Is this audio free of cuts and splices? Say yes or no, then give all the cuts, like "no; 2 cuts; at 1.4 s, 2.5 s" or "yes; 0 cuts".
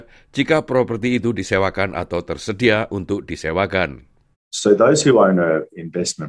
no; 1 cut; at 4.3 s